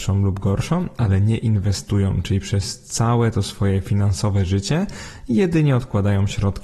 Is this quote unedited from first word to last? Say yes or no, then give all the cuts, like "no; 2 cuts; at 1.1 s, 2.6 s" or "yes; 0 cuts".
yes; 0 cuts